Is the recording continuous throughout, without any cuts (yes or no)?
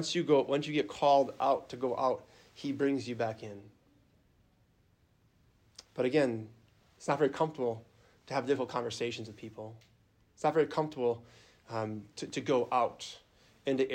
yes